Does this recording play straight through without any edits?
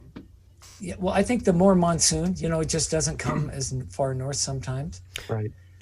yes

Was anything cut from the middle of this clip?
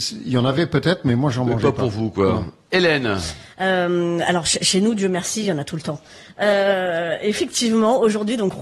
no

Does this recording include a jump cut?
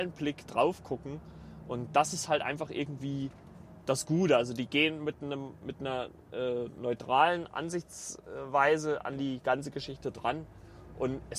no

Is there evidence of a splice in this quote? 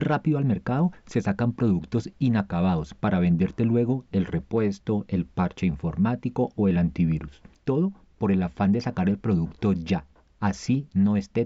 no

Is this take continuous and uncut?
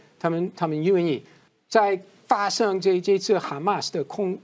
no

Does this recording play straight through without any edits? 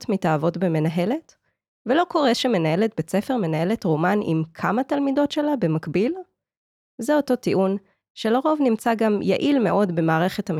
yes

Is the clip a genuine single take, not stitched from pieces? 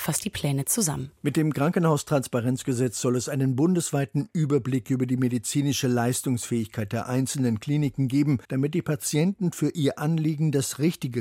no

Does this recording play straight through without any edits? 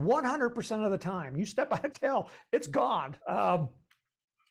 no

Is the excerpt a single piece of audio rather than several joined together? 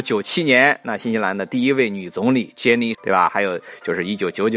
no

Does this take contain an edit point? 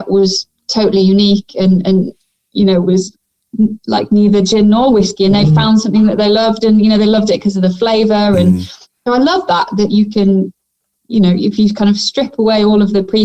no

